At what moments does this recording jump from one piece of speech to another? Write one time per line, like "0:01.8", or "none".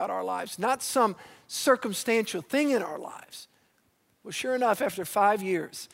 none